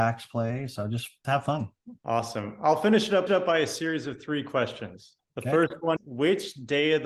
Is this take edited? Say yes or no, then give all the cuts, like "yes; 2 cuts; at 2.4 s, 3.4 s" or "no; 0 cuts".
yes; 5 cuts; at 1.2 s, 2.0 s, 3.3 s, 5.2 s, 6.0 s